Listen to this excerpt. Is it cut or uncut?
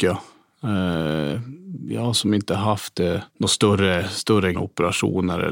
cut